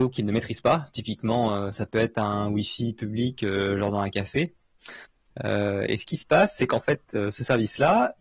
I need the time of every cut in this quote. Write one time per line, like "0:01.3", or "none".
none